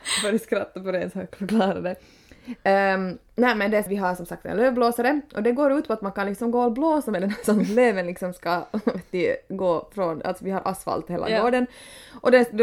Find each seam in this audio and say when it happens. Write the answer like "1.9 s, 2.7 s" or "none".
3.9 s